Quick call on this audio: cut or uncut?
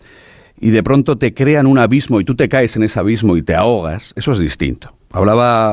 uncut